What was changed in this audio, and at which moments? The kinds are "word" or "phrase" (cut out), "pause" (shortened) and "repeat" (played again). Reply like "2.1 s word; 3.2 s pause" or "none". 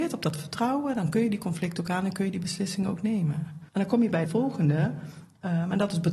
3.7 s pause; 4.3 s phrase